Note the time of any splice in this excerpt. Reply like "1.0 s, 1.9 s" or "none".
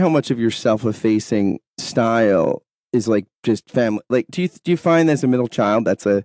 none